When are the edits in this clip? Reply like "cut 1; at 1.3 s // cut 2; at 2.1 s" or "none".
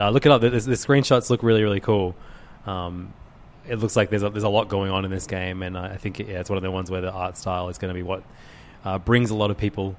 none